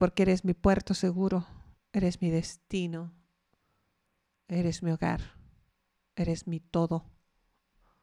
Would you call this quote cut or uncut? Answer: uncut